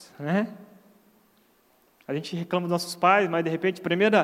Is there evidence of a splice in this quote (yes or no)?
no